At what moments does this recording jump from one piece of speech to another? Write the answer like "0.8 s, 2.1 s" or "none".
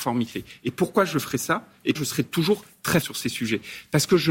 1.9 s, 3.0 s